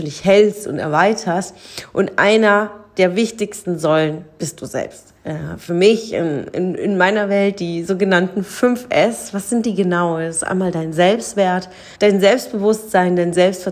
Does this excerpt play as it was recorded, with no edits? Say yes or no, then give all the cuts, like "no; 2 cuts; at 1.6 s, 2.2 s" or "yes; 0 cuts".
no; 2 cuts; at 5.2 s, 11.9 s